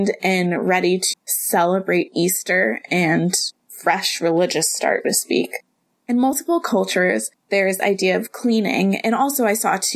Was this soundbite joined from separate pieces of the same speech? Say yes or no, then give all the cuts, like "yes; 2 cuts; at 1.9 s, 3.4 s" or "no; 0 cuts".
yes; 4 cuts; at 1.1 s, 3.6 s, 5.0 s, 7.8 s